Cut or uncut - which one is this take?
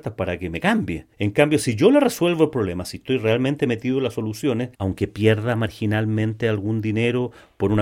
cut